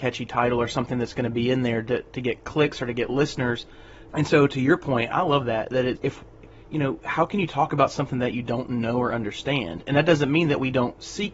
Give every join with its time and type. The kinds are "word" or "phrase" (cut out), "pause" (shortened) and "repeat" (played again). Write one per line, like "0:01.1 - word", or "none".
0:04.1 - word
0:06.0 - word